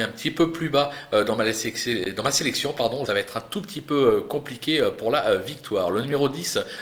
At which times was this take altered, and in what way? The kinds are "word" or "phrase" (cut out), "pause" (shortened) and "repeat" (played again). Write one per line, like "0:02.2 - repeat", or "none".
0:03.1 - phrase